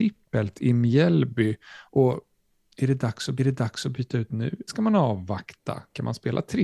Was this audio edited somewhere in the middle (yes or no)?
yes